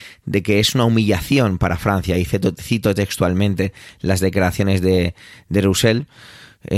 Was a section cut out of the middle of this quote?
no; 0 cuts

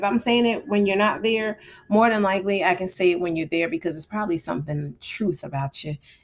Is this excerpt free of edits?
yes; 0 cuts

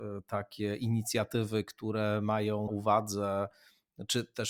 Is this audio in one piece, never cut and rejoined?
no; 1 cut; at 2.7 s

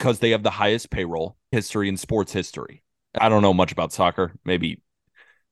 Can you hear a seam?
yes; 2 cuts; at 1.5 s, 3.2 s

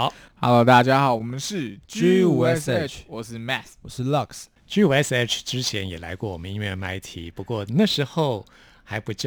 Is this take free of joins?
yes; 0 cuts

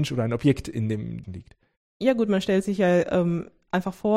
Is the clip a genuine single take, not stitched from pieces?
no; 1 cut; at 1.2 s

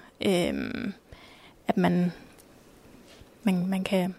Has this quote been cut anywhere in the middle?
no; 0 cuts

